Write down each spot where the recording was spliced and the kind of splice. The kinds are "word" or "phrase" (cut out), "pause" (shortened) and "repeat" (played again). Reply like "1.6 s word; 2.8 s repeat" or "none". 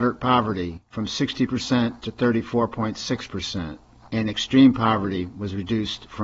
none